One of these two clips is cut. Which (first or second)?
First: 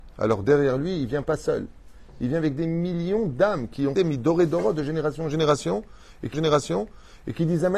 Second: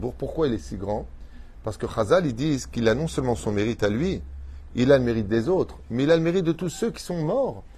first